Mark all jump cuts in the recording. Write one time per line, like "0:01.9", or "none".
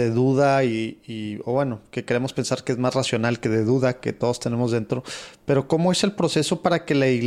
none